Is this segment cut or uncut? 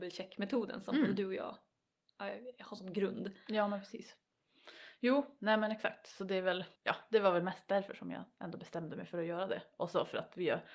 cut